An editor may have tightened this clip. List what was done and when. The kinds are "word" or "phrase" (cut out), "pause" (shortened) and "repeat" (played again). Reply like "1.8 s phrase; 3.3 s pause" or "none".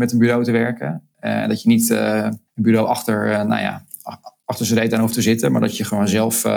2.5 s pause